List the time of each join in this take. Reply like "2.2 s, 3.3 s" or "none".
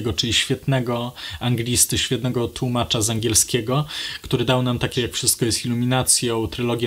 5.0 s